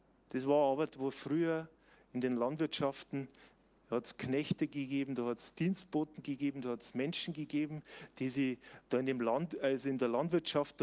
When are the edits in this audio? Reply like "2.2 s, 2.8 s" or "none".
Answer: none